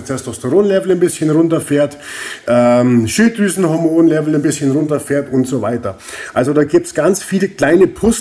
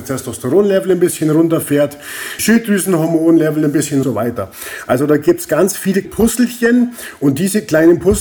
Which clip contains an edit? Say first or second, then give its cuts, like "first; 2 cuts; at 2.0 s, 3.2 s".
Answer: second; 3 cuts; at 2.4 s, 4.0 s, 6.0 s